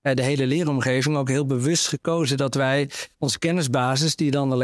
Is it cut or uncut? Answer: cut